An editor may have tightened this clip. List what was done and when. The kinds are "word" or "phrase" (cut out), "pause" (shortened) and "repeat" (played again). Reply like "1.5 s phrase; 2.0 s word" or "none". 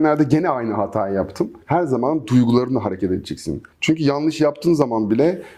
1.6 s pause; 3.7 s pause